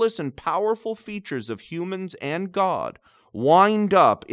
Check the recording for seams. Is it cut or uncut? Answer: uncut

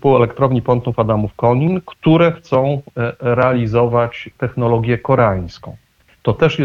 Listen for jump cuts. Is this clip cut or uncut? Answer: uncut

